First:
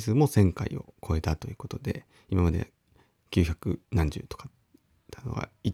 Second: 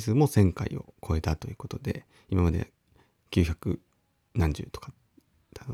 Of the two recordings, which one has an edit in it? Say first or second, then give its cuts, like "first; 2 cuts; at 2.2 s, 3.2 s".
first; 1 cut; at 3.8 s